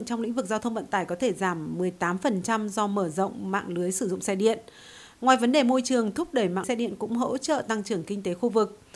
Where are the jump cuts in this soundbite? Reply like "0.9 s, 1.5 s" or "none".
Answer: 6.6 s